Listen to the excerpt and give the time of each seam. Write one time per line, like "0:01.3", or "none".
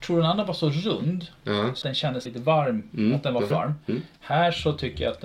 0:01.8
0:02.3
0:03.5